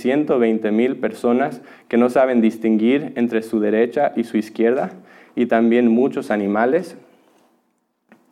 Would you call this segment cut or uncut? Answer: uncut